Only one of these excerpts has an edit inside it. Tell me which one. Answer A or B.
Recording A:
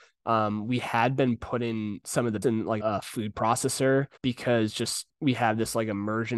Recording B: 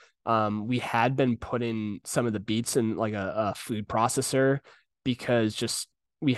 A